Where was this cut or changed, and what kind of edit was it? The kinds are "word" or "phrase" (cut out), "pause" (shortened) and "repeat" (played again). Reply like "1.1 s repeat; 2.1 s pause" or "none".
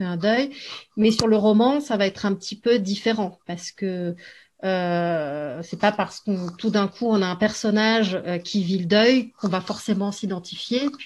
3.4 s pause